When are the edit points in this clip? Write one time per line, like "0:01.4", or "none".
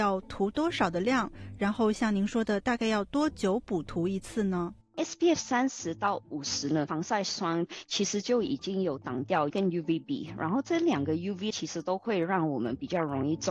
0:09.5
0:11.5